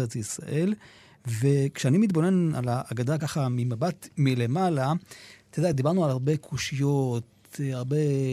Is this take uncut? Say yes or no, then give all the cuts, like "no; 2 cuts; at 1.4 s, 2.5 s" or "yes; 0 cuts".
yes; 0 cuts